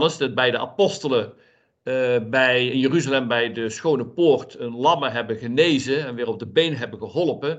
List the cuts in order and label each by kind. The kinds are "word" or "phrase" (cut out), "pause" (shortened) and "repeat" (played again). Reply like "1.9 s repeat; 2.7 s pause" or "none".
none